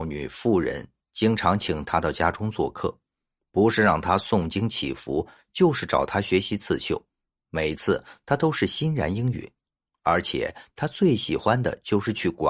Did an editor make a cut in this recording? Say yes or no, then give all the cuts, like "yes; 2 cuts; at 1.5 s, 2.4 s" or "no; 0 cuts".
no; 0 cuts